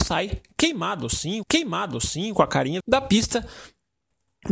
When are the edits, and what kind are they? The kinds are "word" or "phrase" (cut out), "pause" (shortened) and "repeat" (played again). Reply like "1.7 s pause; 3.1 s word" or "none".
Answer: 1.4 s repeat; 2.8 s word